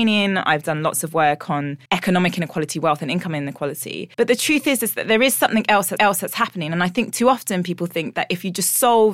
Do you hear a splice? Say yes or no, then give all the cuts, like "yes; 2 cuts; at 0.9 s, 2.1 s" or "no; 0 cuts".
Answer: yes; 3 cuts; at 1.9 s, 4.1 s, 6.0 s